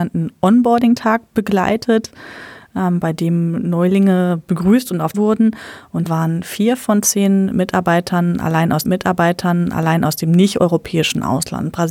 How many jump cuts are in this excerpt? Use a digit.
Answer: 3